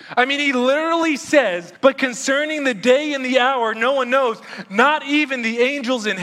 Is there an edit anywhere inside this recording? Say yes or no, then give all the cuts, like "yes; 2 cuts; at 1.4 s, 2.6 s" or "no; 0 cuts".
yes; 1 cut; at 1.8 s